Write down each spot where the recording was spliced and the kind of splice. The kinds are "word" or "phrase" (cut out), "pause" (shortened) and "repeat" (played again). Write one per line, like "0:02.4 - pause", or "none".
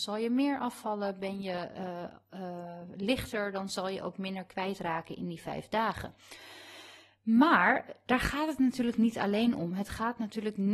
none